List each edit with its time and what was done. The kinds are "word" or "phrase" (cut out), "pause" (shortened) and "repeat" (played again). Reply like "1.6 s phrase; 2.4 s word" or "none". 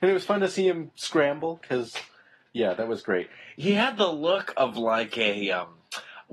none